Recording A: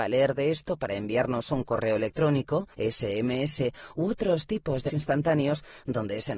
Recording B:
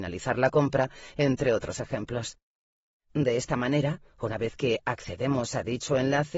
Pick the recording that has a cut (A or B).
A